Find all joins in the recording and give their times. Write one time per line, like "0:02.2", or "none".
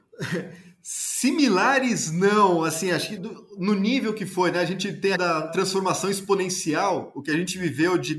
0:03.2
0:05.2
0:05.5